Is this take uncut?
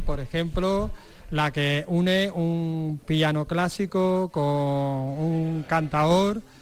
yes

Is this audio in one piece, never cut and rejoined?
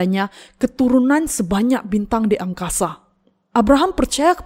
yes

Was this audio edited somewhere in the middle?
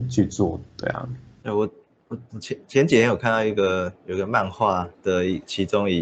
yes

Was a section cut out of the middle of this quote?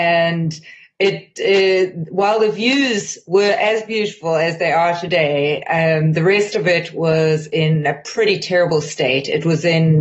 no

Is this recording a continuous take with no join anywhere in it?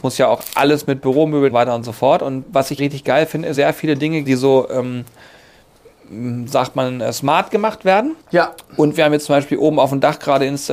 no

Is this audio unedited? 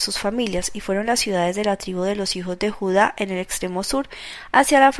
yes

